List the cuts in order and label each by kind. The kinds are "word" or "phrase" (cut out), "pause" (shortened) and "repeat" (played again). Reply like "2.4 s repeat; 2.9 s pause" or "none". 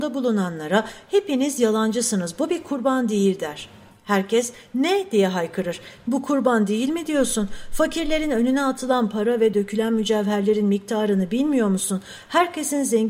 none